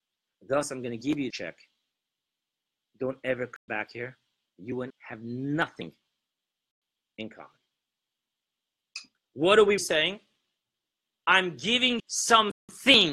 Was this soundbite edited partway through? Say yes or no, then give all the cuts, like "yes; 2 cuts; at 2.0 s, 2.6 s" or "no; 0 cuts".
yes; 5 cuts; at 1.3 s, 3.7 s, 4.9 s, 9.8 s, 12.0 s